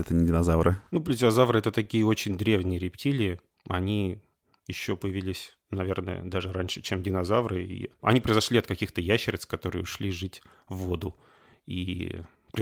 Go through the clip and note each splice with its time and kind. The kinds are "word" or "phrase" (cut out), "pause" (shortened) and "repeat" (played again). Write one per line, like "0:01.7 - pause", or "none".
none